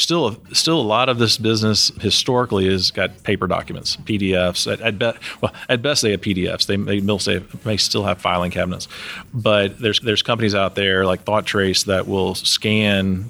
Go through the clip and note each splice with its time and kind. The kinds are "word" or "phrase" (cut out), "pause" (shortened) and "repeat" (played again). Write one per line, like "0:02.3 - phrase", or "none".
0:10.0 - repeat